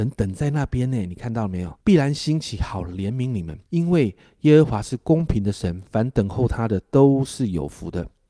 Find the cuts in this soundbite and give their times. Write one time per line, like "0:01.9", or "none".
0:01.8
0:03.6

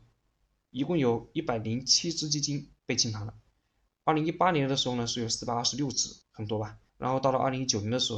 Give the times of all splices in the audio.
0:02.8
0:06.2
0:06.9

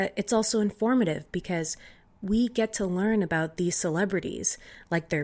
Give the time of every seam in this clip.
none

